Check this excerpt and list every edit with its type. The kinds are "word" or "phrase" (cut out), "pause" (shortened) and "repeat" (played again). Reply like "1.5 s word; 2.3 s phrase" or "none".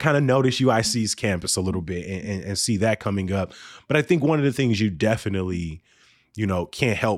none